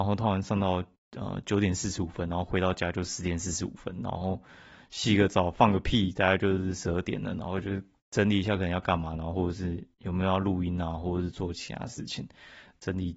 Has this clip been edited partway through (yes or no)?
no